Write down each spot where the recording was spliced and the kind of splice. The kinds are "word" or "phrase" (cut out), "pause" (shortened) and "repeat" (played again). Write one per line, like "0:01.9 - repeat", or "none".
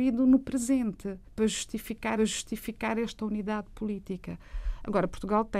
0:01.3 - pause
0:02.2 - repeat